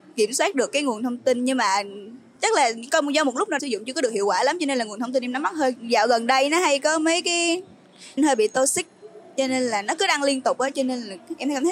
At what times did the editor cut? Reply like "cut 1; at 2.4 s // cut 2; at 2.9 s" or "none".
cut 1; at 3.6 s // cut 2; at 5.8 s // cut 3; at 8.2 s